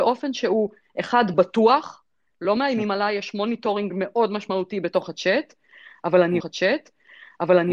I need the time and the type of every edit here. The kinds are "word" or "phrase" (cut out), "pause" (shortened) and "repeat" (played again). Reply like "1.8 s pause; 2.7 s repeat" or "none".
6.4 s repeat